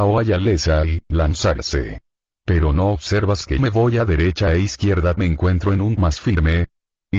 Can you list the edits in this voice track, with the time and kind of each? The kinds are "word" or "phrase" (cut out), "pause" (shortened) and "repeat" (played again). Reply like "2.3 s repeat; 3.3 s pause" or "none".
3.6 s word; 5.2 s phrase; 6.0 s word